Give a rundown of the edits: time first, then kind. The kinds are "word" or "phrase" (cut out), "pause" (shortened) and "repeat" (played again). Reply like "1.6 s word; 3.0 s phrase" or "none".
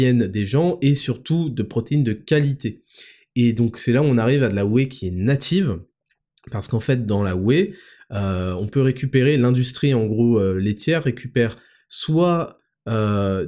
none